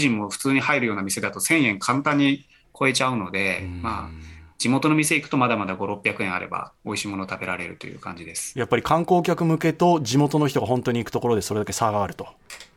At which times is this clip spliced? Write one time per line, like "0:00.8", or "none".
none